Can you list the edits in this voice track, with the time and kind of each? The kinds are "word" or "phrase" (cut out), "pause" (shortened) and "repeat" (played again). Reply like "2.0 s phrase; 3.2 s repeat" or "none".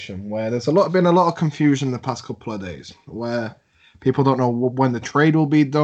none